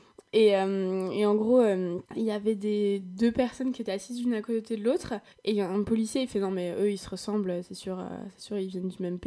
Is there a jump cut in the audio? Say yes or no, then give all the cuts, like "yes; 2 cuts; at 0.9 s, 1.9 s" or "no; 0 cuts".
yes; 2 cuts; at 2.1 s, 5.3 s